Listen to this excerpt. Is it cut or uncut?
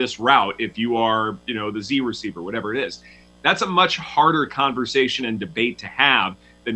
uncut